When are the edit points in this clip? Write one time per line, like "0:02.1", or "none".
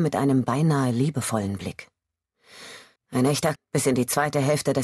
0:03.0
0:03.6